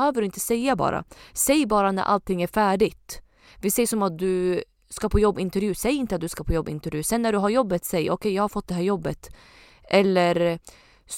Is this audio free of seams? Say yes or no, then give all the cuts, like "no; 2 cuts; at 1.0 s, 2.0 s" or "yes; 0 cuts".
yes; 0 cuts